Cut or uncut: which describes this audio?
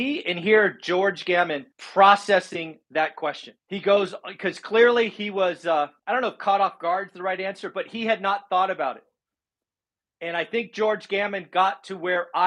cut